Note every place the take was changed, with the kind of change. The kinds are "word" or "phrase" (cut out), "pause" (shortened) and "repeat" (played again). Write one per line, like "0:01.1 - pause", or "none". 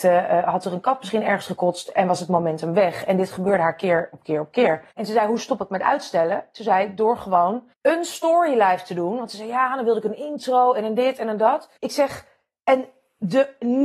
0:04.9 - pause
0:07.7 - pause
0:11.8 - pause

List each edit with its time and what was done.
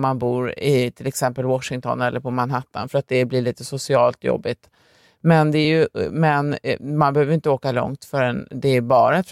none

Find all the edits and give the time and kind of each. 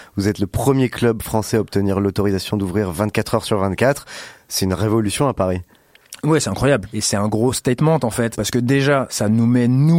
none

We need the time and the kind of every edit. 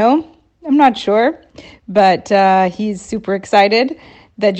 none

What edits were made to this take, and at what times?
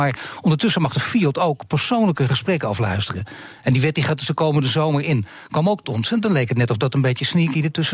0:05.8 - word

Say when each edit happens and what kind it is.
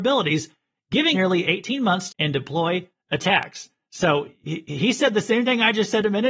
0:01.1 - word
0:02.1 - phrase

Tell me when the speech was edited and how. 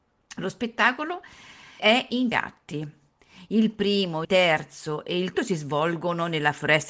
0:01.8 - word
0:02.3 - word
0:04.2 - word
0:05.3 - word

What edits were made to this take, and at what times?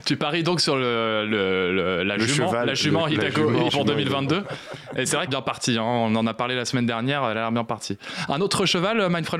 0:03.7 - word
0:05.3 - phrase

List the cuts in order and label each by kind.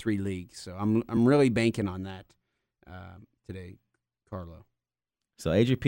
none

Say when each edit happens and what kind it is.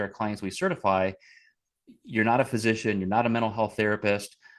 none

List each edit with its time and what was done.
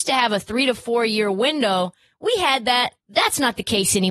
0:03.0 - pause

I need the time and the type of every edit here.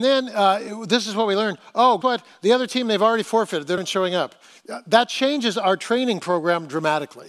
0:02.0 - word
0:03.8 - word

